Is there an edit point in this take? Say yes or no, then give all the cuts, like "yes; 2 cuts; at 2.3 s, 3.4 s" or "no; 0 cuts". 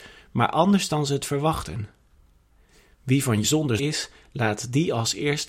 yes; 2 cuts; at 3.4 s, 3.8 s